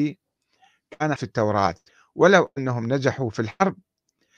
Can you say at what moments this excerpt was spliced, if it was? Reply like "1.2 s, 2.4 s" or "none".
1.2 s, 1.9 s